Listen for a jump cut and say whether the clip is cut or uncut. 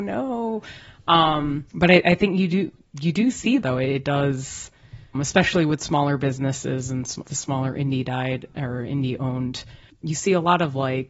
cut